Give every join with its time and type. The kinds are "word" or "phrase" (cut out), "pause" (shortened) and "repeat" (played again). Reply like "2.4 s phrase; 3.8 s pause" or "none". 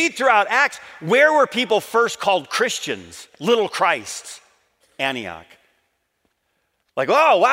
none